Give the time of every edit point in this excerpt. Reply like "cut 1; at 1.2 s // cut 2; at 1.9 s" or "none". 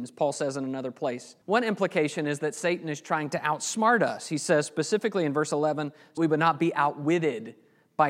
cut 1; at 1.4 s // cut 2; at 6.2 s